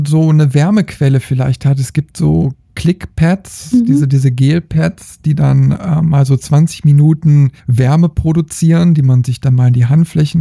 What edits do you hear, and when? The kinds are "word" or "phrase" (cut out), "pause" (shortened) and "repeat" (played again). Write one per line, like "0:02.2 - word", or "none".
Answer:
0:07.6 - pause